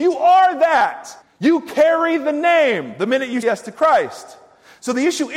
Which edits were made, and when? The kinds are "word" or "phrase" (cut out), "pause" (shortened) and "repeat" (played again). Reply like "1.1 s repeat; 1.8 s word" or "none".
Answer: 1.2 s pause; 3.4 s word